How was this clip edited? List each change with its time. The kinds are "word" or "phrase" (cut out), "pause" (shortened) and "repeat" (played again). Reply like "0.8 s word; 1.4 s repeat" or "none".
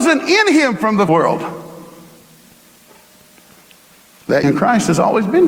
1.1 s phrase; 4.4 s word